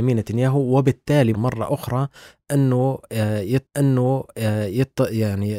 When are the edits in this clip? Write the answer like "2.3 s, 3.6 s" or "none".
1.3 s, 3.7 s